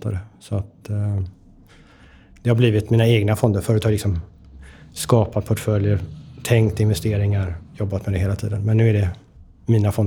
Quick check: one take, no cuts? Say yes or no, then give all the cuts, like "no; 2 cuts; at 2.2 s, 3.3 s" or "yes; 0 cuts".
yes; 0 cuts